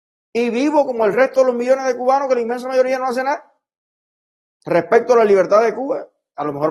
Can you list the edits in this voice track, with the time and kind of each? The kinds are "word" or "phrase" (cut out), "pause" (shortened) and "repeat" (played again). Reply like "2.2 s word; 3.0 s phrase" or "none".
none

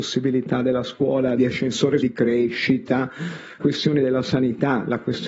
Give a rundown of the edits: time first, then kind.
1.4 s phrase; 2.0 s word; 3.6 s word

